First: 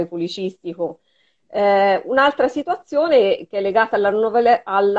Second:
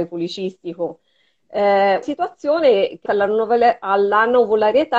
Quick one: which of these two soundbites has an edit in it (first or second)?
second